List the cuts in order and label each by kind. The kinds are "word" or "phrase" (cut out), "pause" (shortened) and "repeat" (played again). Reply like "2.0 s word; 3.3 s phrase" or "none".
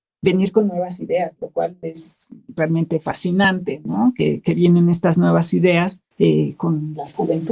6.1 s pause